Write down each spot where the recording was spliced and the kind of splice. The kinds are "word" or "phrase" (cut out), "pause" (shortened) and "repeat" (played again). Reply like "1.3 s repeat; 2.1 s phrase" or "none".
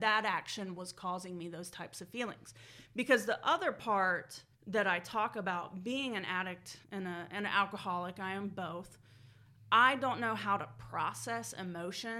4.5 s pause; 6.8 s pause